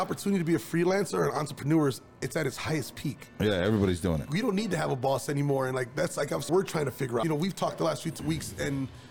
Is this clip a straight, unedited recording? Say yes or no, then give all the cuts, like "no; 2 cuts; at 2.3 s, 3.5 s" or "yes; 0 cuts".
no; 2 cuts; at 6.5 s, 7.2 s